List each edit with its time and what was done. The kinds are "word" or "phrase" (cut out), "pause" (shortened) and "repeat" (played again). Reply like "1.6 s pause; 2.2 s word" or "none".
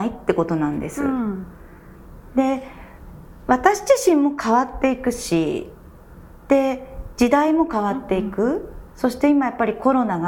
8.9 s pause